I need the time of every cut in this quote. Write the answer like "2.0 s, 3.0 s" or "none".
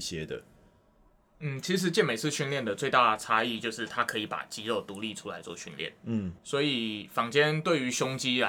6.4 s